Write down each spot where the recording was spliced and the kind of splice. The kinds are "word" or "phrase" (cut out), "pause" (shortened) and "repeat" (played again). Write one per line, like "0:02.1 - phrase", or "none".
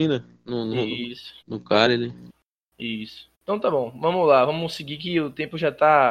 0:01.4 - pause
0:03.3 - pause